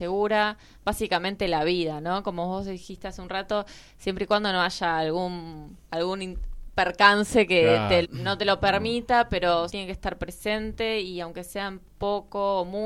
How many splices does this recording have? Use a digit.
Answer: 3